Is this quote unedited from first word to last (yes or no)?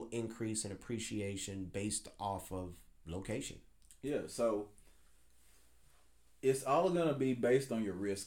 yes